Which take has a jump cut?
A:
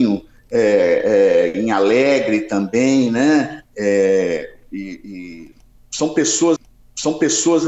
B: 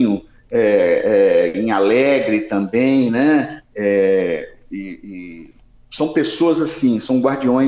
A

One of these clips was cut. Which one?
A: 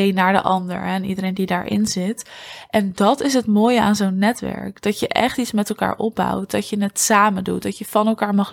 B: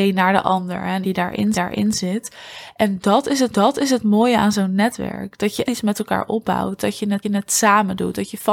B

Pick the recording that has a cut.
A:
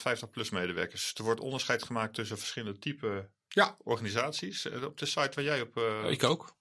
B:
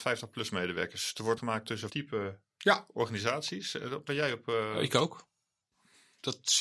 B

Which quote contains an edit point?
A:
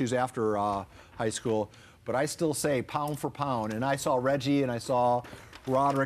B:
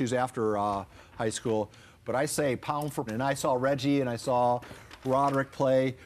B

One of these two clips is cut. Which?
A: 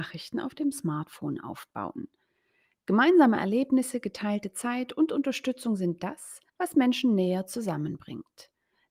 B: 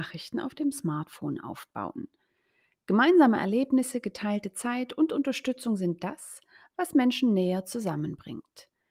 A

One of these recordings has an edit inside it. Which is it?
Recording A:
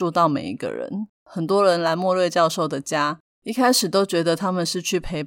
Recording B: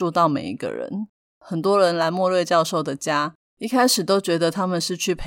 A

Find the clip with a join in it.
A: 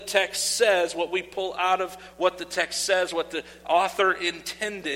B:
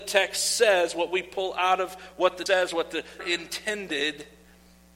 B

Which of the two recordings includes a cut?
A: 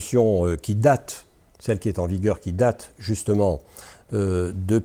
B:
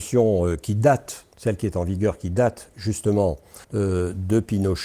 B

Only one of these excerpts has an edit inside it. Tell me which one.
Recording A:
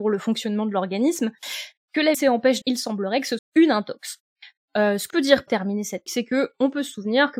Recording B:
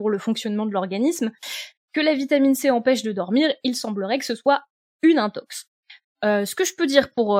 A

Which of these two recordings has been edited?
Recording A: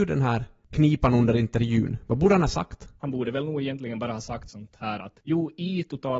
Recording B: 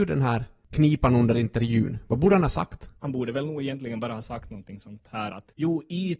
A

